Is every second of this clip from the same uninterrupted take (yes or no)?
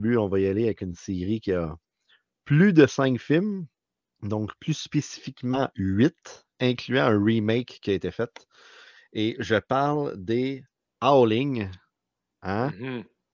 yes